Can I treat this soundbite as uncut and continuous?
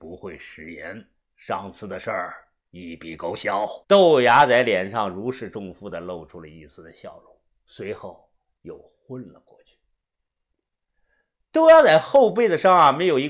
no; 2 cuts; at 1.1 s, 3.8 s

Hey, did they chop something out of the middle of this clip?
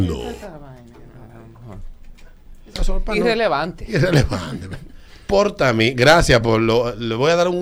no; 0 cuts

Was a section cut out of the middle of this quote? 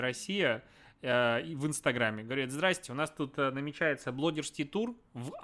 no; 0 cuts

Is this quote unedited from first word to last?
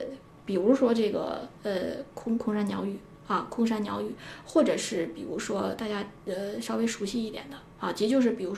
no; 1 cut; at 1.6 s

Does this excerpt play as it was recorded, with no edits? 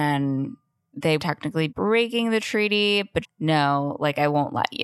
no; 3 cuts; at 1.2 s, 1.7 s, 3.2 s

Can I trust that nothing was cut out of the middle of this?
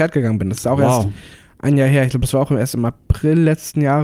yes; 0 cuts

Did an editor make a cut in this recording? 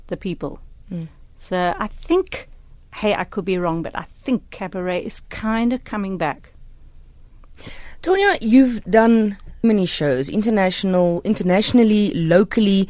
yes; 1 cut; at 9.6 s

